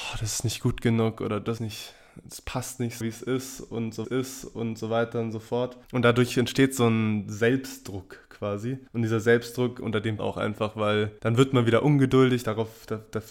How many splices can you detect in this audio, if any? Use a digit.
7